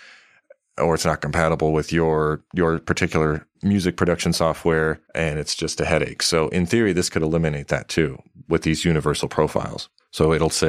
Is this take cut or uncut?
cut